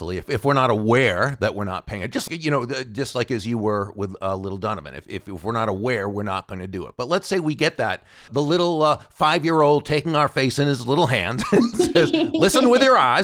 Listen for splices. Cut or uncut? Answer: cut